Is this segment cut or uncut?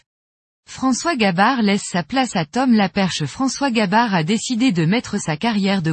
uncut